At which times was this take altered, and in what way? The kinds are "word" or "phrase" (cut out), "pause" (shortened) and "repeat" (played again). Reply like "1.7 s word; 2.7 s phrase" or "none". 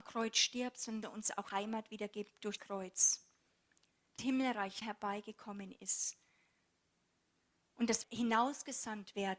1.0 s word; 1.5 s word; 2.6 s word; 4.2 s word; 4.8 s word; 8.0 s word

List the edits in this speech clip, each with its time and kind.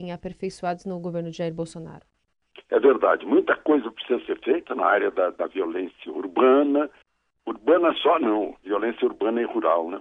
7.0 s pause

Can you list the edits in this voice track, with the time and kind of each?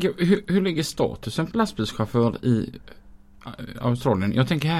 1.5 s word

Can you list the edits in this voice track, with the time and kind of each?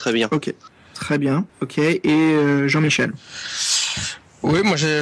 1.5 s pause

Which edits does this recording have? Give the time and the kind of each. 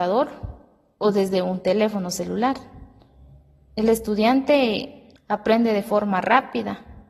5.2 s pause

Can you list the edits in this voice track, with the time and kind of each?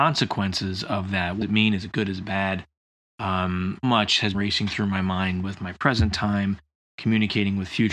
1.4 s word; 3.8 s word; 4.3 s word; 5.4 s word

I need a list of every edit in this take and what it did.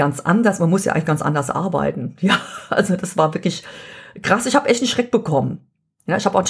none

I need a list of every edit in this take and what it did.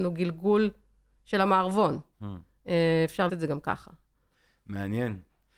3.3 s word

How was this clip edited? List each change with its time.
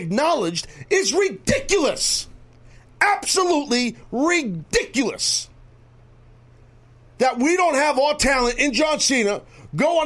none

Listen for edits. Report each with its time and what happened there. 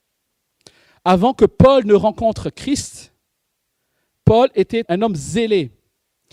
4.8 s word

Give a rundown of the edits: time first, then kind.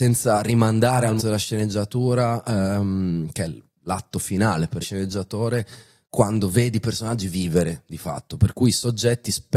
1.2 s word; 4.8 s phrase

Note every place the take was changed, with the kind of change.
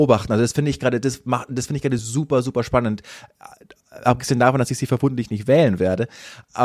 none

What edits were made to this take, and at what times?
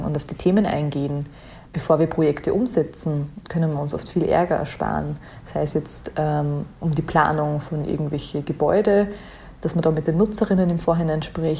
1.7 s pause

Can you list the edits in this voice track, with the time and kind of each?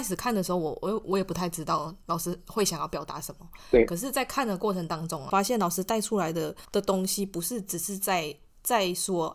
6.6 s pause

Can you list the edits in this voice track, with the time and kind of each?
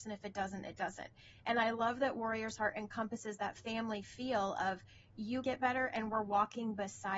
5.4 s word

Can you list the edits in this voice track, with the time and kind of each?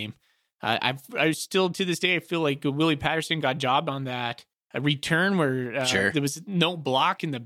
4.5 s pause

